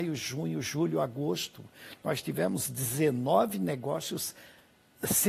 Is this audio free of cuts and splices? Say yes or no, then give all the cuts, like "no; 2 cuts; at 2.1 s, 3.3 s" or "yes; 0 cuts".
yes; 0 cuts